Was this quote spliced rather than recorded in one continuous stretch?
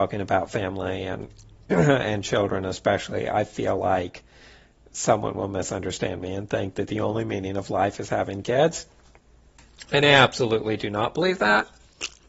no; 0 cuts

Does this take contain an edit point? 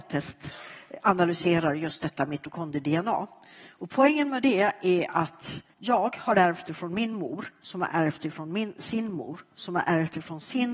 yes; 1 cut; at 5.7 s

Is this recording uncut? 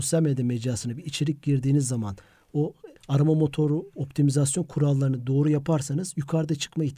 no; 1 cut; at 3.0 s

